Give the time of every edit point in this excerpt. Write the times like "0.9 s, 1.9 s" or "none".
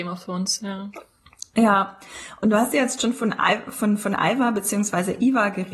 none